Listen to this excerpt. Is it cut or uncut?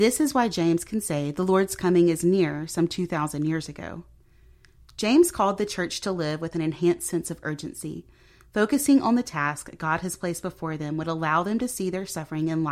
uncut